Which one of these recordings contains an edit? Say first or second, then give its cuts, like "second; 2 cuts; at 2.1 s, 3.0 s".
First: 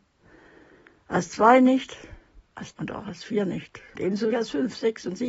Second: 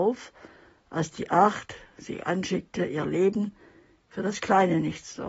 first; 3 cuts; at 2.7 s, 3.9 s, 4.3 s